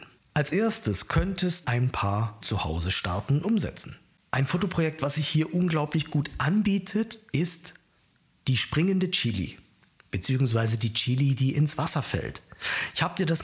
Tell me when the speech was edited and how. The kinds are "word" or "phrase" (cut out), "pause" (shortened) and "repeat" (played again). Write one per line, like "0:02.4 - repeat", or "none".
0:01.6 - word
0:02.4 - word
0:03.4 - word